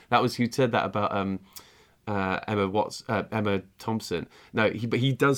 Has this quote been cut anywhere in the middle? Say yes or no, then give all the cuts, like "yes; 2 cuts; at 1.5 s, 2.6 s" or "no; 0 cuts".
no; 0 cuts